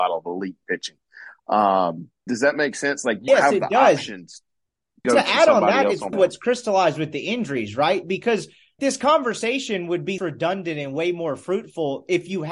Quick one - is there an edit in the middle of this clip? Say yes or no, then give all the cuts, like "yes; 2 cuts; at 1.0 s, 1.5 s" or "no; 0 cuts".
yes; 6 cuts; at 2.3 s, 3.3 s, 5.0 s, 6.1 s, 8.8 s, 10.2 s